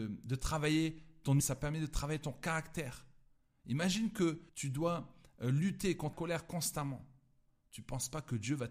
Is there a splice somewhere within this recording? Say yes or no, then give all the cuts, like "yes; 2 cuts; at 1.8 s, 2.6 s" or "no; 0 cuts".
yes; 3 cuts; at 1.4 s, 4.5 s, 6.1 s